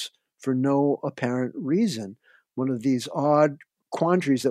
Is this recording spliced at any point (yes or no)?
no